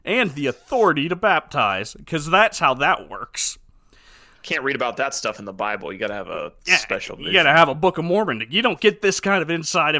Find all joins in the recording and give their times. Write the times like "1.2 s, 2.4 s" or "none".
none

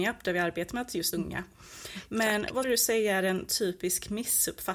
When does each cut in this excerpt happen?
1.1 s, 2.6 s

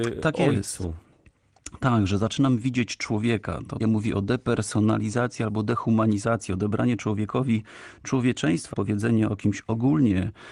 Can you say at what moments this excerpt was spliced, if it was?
3.8 s, 8.7 s

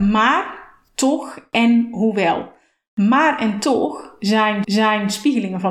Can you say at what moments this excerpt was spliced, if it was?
4.6 s

